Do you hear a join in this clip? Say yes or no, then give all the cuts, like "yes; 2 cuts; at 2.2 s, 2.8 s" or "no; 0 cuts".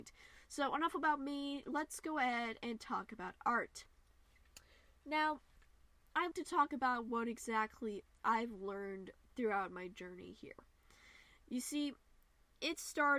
yes; 1 cut; at 6.3 s